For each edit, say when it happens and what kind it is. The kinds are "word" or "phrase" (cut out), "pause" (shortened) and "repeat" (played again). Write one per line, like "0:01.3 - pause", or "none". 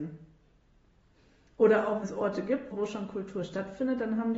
0:02.0 - word
0:02.7 - word